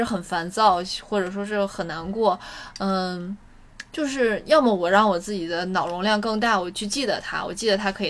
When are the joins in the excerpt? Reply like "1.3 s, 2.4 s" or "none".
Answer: none